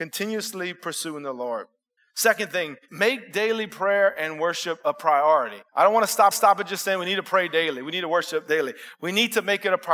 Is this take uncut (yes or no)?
no